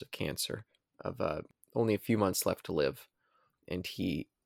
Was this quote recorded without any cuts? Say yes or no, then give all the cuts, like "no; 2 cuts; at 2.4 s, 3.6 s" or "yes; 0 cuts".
yes; 0 cuts